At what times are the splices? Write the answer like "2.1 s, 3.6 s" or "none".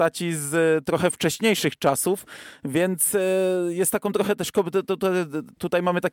none